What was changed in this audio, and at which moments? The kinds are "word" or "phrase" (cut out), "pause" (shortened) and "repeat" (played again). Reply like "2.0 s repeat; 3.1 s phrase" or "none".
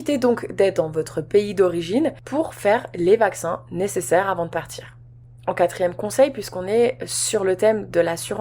none

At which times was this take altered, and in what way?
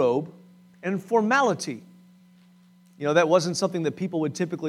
none

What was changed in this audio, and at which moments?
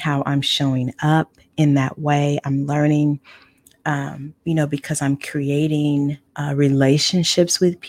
4.4 s pause; 6.3 s pause

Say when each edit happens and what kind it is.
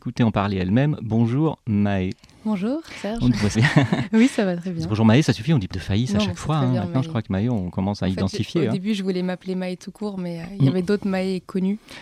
3.5 s word; 5.7 s word

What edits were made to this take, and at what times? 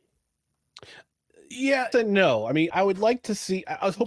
1.9 s word; 2.7 s word

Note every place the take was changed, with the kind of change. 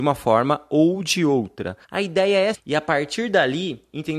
1.8 s pause; 2.5 s phrase

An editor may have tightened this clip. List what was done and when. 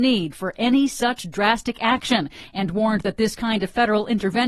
none

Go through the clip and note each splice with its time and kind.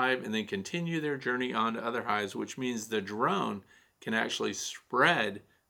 none

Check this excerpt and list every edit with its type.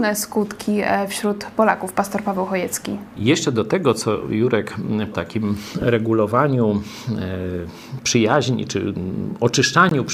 5.1 s phrase

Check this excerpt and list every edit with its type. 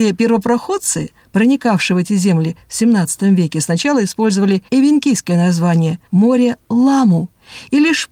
4.7 s pause; 6.1 s pause

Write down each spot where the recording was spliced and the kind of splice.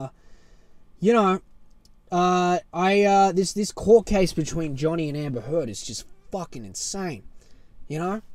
none

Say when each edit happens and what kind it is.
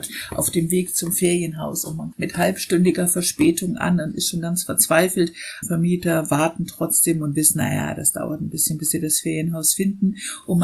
2.1 s word; 5.6 s phrase

